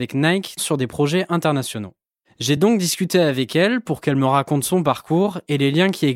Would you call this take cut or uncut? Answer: uncut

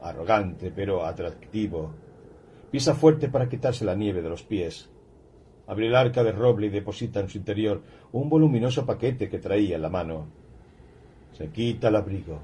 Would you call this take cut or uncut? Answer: uncut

